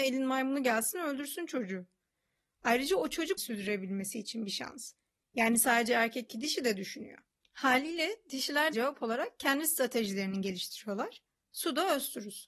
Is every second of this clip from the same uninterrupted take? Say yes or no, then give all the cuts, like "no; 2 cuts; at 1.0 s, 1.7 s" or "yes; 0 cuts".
no; 4 cuts; at 3.4 s, 6.3 s, 7.3 s, 8.7 s